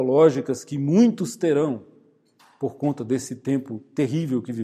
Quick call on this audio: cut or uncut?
uncut